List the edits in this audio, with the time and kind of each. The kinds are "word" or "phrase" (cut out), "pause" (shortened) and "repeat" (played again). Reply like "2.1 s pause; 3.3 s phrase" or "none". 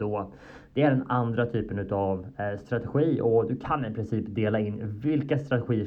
none